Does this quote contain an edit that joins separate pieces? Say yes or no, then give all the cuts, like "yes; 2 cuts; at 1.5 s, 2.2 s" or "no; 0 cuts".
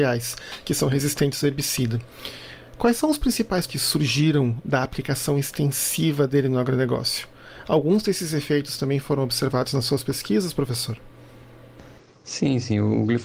yes; 1 cut; at 3.7 s